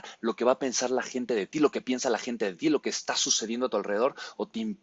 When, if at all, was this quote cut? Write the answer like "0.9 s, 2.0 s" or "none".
none